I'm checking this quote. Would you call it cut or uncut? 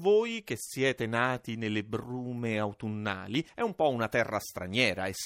uncut